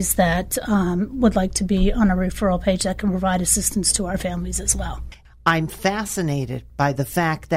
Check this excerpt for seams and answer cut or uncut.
uncut